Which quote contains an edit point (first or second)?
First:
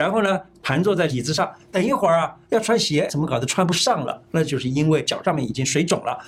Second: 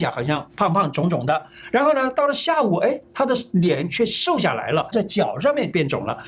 first